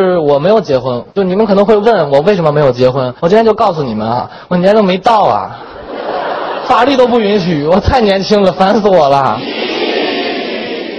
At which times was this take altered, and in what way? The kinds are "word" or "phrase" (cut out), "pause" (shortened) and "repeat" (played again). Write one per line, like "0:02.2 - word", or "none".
0:03.2 - pause